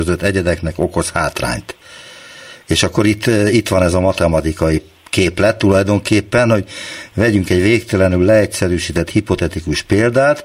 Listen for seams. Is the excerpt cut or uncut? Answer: uncut